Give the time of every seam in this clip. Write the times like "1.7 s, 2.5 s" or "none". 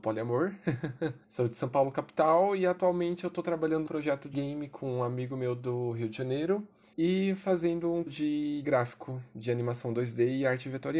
1.2 s, 3.9 s, 4.3 s, 6.9 s, 8.1 s, 8.6 s